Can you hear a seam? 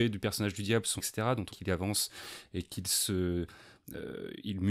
yes; 2 cuts; at 1.0 s, 1.5 s

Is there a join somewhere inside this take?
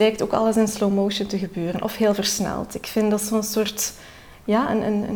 no; 0 cuts

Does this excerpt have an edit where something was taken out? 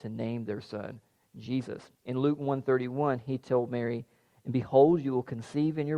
yes; 1 cut; at 2.0 s

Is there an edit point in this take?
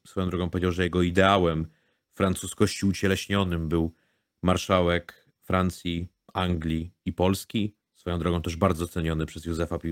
yes; 1 cut; at 7.8 s

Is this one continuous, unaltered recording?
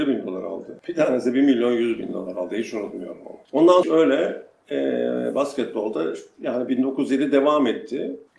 no; 1 cut; at 3.8 s

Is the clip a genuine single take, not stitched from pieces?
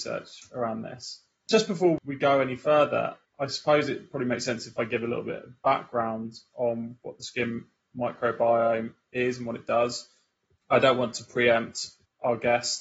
yes; 0 cuts

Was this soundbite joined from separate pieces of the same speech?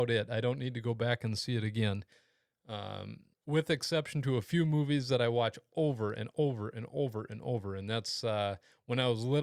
yes; 1 cut; at 3.3 s

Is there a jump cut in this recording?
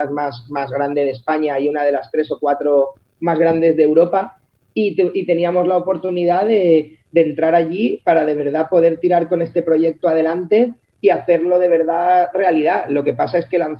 no; 0 cuts

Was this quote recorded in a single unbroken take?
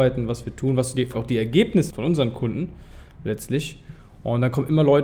no; 2 cuts; at 1.1 s, 1.9 s

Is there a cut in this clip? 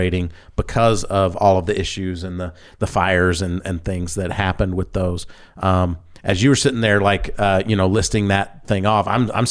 no; 0 cuts

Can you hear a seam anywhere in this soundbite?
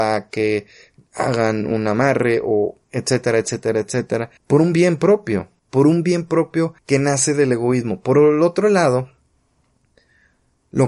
yes; 4 cuts; at 2.8 s, 4.4 s, 5.6 s, 6.8 s

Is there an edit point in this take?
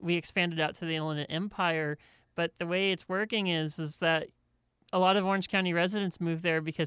no; 0 cuts

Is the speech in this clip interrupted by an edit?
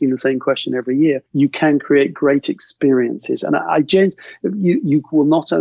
yes; 1 cut; at 1.3 s

